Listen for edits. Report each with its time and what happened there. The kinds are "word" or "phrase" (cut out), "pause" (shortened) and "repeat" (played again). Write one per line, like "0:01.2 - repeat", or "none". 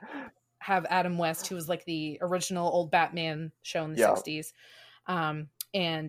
none